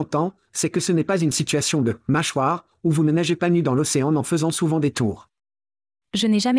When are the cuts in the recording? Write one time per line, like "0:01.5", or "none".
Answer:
none